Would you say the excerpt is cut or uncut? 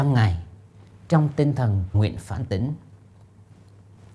cut